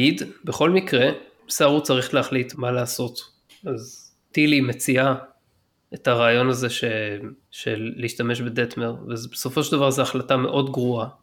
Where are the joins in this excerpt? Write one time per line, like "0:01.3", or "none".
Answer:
0:02.5